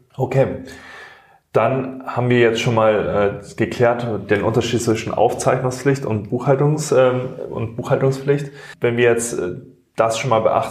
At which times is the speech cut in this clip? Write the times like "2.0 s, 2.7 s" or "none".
none